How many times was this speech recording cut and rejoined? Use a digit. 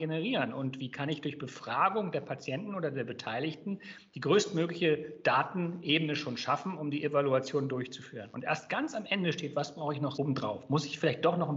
1